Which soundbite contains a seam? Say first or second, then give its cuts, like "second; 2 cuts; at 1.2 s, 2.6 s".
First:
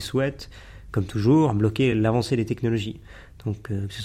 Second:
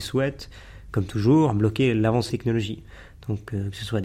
second; 1 cut; at 2.3 s